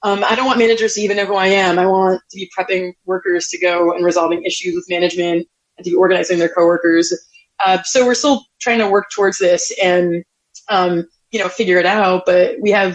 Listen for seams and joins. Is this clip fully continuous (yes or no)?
yes